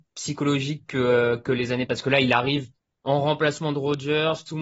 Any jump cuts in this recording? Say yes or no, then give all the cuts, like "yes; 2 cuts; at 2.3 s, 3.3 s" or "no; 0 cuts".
yes; 2 cuts; at 1.9 s, 2.8 s